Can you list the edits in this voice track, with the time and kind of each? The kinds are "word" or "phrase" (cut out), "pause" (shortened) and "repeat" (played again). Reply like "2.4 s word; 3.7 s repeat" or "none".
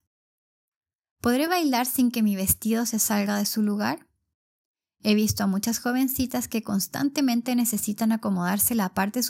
none